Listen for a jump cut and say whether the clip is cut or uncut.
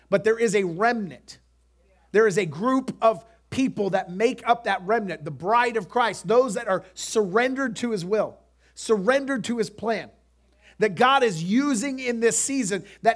uncut